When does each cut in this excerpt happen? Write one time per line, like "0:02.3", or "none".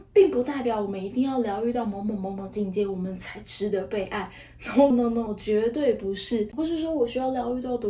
0:04.9
0:05.3

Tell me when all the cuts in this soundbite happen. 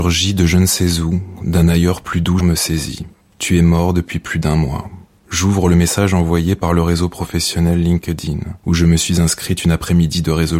0:02.4
0:03.2
0:05.2

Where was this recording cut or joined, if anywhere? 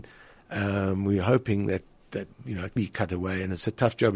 0:02.8

